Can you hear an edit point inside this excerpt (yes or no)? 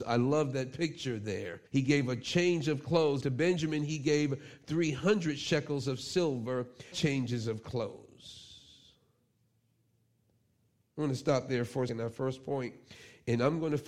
yes